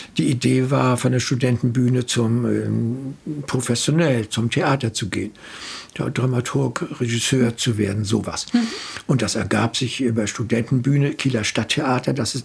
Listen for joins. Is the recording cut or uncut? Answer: uncut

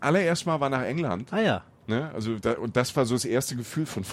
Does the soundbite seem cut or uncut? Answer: cut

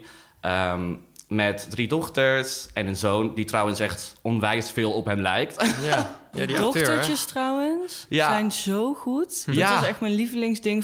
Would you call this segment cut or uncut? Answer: uncut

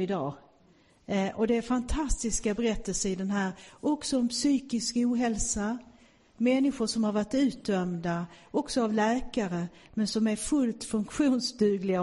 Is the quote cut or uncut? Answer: uncut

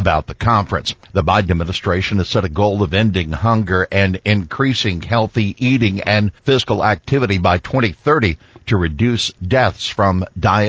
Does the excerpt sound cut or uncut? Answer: cut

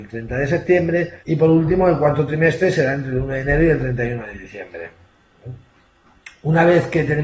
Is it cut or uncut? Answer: cut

